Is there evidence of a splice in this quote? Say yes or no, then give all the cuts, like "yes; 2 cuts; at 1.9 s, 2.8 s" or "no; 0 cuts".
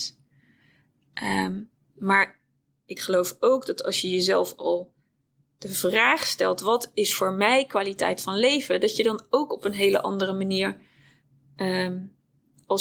no; 0 cuts